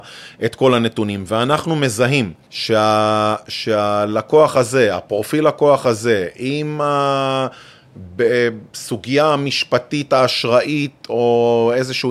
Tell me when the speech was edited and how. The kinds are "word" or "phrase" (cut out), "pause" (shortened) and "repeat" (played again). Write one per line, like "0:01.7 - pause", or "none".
0:02.4 - pause